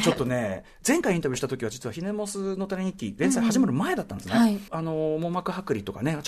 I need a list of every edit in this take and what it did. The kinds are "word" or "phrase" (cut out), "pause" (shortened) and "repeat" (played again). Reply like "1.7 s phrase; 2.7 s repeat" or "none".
4.7 s word